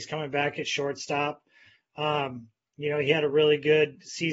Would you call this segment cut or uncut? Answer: uncut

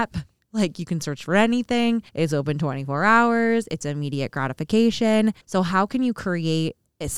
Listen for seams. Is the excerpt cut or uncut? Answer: cut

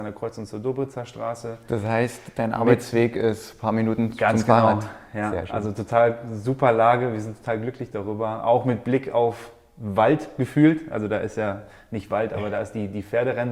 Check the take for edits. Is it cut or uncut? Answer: uncut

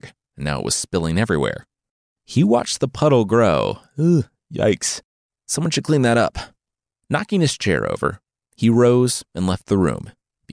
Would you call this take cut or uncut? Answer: uncut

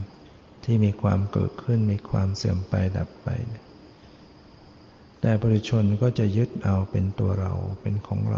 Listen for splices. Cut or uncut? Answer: uncut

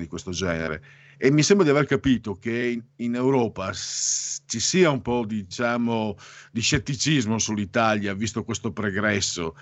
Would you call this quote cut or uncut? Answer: uncut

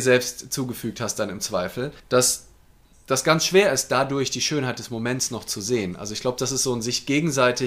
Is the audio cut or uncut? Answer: cut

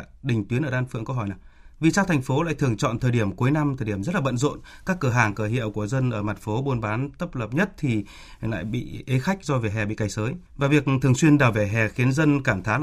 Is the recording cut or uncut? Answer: cut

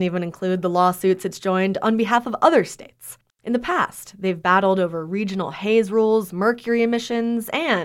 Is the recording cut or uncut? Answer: uncut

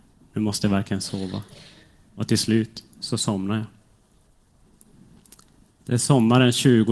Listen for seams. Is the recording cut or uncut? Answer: uncut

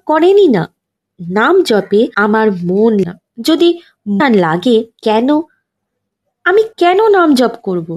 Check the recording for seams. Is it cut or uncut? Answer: cut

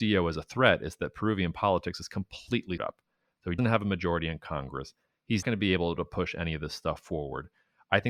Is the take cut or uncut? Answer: cut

